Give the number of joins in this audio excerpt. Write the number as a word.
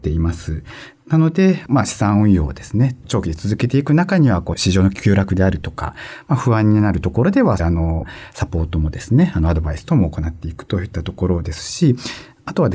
one